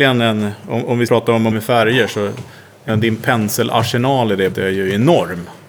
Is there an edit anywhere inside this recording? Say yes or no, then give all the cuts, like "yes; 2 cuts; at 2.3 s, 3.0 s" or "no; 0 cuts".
yes; 4 cuts; at 1.1 s, 1.5 s, 2.9 s, 4.5 s